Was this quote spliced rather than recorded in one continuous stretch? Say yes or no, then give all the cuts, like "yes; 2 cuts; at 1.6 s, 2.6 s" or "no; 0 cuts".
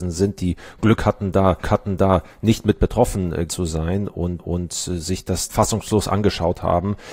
yes; 4 cuts; at 1.6 s, 3.5 s, 4.4 s, 5.5 s